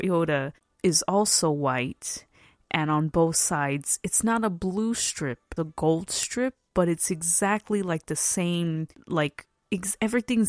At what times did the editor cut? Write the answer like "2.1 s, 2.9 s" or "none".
5.6 s